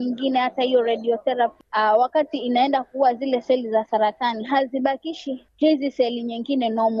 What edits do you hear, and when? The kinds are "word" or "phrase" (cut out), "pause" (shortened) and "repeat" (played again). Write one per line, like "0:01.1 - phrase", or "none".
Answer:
none

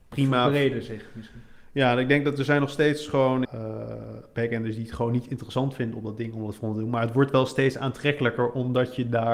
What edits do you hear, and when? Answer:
0:03.4 - phrase

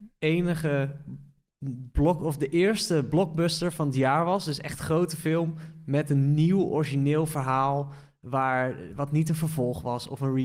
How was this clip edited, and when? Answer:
none

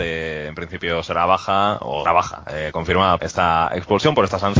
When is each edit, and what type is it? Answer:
0:02.1 - word
0:03.2 - word

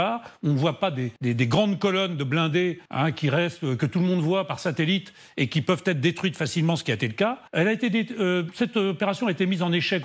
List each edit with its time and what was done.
0:01.2 - pause
0:02.9 - pause
0:07.5 - pause

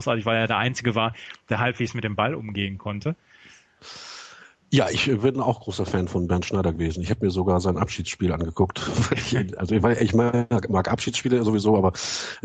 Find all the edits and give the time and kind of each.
none

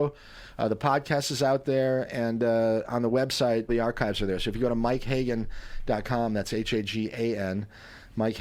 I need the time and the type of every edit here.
0:03.7 - word

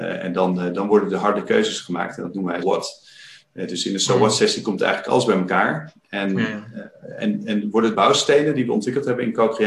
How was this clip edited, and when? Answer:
0:02.6 - word
0:07.9 - word

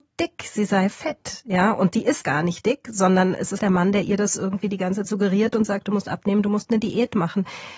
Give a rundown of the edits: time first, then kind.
0:02.2 - word
0:03.6 - word
0:05.0 - word

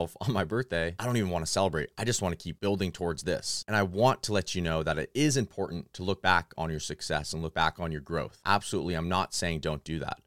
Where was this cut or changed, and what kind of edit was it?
none

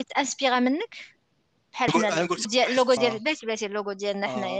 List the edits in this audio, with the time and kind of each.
0:01.9 - word
0:02.4 - word
0:03.0 - word

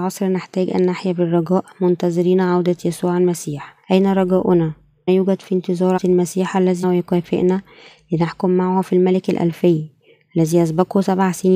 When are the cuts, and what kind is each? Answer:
0:03.8 - pause
0:05.1 - word
0:06.0 - word
0:06.8 - word

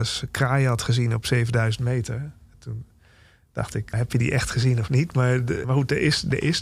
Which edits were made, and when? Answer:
0:03.9 - word
0:05.6 - word

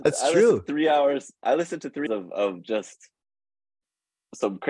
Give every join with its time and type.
0:02.1 - word

